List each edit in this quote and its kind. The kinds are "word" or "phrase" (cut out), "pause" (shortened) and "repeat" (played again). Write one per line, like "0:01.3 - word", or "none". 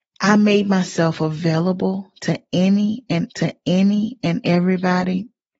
0:03.3 - repeat